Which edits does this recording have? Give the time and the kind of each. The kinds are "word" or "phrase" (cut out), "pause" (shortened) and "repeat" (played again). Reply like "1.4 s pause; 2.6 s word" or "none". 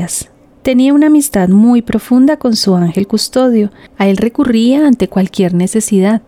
none